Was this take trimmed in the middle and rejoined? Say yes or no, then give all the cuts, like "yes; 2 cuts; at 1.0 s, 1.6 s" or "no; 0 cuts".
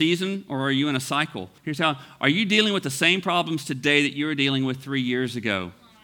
yes; 1 cut; at 1.6 s